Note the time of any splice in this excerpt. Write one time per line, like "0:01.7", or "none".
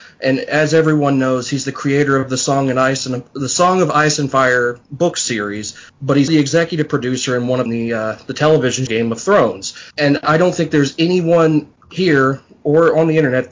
0:04.8
0:05.9
0:06.3
0:07.7
0:08.9
0:09.9
0:11.8